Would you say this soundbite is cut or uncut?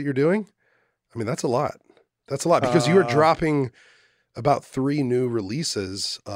uncut